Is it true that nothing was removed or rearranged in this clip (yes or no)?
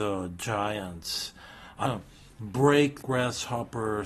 no